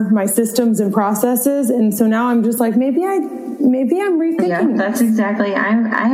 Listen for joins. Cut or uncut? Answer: uncut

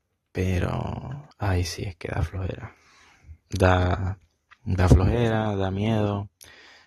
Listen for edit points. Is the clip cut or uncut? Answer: cut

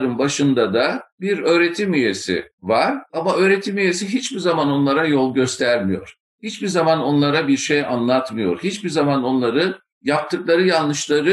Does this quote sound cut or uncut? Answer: cut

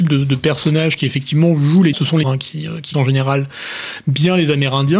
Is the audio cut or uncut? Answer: cut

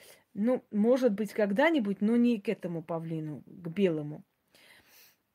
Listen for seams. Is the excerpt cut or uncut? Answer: uncut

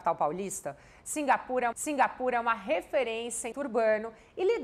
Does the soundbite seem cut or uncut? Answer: cut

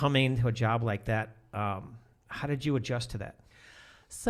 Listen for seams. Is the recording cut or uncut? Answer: uncut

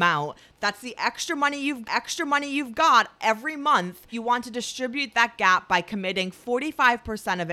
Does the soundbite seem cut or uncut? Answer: cut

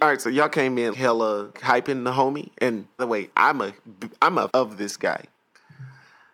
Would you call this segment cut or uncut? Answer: cut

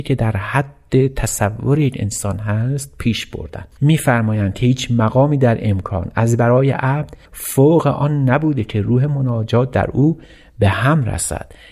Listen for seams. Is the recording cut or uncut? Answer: cut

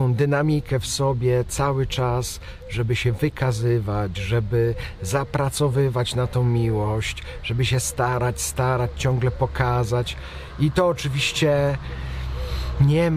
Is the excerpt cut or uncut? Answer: uncut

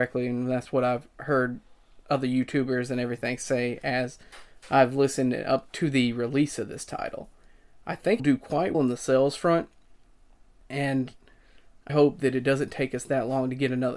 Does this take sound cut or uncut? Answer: cut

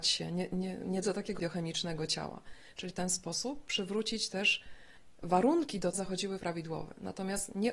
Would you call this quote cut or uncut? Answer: cut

